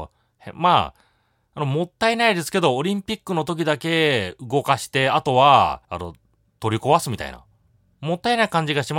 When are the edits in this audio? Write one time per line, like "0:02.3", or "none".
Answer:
0:05.8